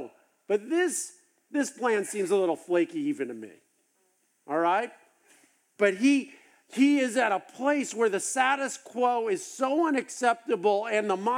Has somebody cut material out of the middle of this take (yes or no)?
no